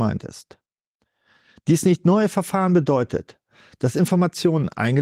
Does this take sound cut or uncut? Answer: uncut